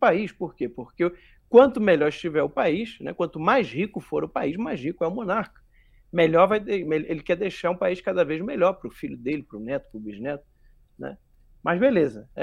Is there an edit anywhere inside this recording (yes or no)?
no